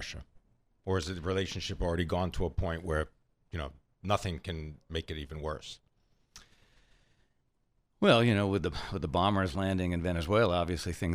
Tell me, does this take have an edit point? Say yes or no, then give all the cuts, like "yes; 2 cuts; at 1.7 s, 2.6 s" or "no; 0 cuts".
no; 0 cuts